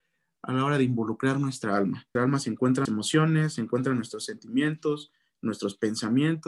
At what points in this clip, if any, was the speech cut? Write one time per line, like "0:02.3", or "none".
0:02.2
0:02.9